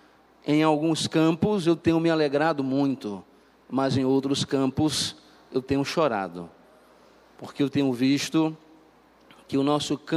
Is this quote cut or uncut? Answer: uncut